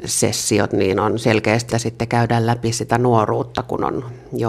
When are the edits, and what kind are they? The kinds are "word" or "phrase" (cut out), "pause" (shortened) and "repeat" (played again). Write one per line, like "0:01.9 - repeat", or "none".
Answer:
0:01.7 - word

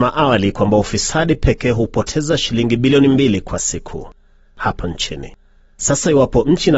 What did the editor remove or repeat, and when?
none

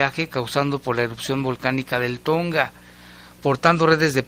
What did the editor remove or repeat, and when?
none

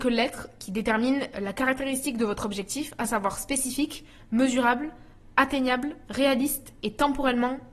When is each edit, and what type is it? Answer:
none

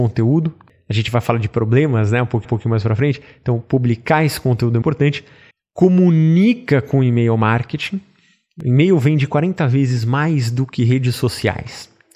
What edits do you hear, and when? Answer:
0:02.4 - repeat
0:04.8 - word
0:05.5 - pause

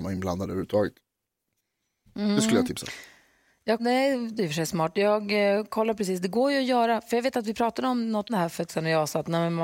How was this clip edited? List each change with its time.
0:03.8 - word
0:04.4 - word
0:08.3 - word
0:08.7 - word

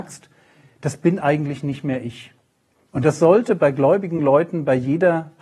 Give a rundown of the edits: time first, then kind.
none

